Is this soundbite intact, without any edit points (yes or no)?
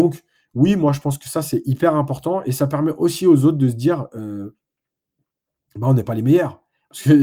yes